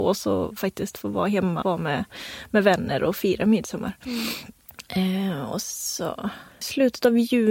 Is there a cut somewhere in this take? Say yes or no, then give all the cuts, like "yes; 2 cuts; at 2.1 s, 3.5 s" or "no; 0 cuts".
yes; 2 cuts; at 1.6 s, 6.6 s